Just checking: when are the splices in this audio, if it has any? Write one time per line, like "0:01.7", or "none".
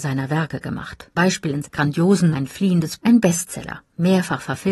0:01.2
0:01.6
0:02.3
0:03.0